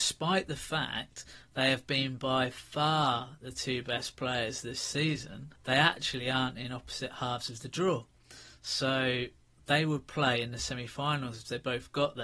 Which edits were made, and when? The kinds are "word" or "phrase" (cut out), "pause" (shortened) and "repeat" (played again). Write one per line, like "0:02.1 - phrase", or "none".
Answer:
0:05.6 - pause